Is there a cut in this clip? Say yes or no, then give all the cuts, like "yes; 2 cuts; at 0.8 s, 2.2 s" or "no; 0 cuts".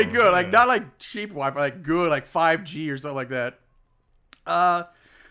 no; 0 cuts